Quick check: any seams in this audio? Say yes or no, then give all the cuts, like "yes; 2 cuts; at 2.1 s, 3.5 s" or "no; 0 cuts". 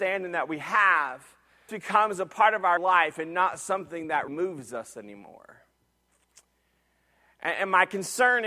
yes; 3 cuts; at 1.7 s, 2.8 s, 4.3 s